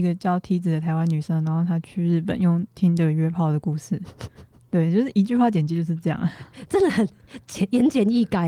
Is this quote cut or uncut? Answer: uncut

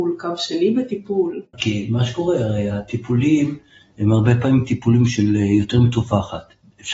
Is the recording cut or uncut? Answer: uncut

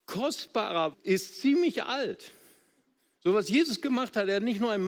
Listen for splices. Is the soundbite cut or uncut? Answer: cut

